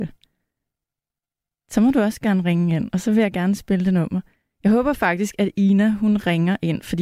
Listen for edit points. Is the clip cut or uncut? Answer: uncut